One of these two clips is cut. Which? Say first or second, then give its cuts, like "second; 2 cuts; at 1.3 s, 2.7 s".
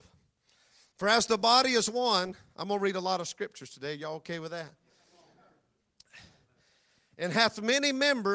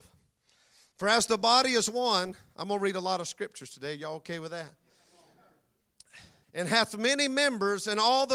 second; 1 cut; at 6.4 s